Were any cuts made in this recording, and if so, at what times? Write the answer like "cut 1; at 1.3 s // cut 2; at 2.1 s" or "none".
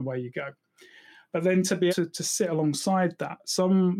cut 1; at 1.9 s